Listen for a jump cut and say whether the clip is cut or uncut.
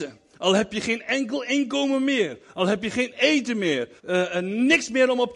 cut